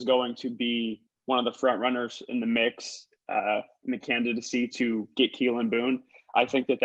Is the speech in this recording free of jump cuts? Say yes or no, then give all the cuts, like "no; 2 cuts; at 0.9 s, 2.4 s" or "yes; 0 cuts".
yes; 0 cuts